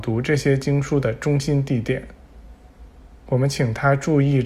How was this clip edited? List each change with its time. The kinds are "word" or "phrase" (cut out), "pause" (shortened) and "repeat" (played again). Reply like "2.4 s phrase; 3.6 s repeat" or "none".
none